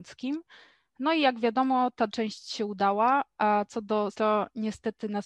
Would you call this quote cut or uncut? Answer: cut